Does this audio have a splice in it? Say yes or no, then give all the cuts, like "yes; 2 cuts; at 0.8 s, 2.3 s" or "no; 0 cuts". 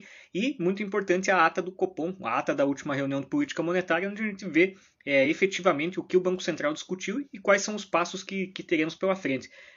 no; 0 cuts